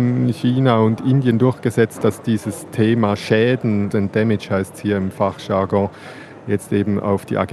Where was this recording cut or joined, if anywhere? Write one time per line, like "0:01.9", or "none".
0:03.9